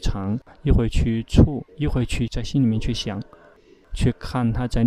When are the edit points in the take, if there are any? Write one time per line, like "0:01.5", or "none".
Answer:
0:01.7